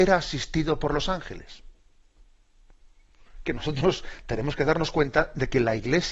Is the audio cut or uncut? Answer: cut